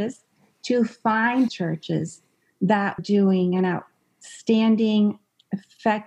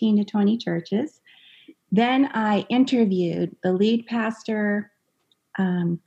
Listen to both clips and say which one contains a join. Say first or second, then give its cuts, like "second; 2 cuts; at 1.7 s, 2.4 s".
first; 2 cuts; at 1.5 s, 3.0 s